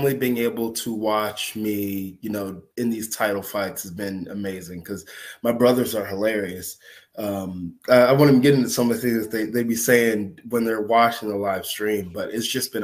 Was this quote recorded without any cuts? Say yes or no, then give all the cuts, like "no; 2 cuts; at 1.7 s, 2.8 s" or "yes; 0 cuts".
no; 1 cut; at 2.7 s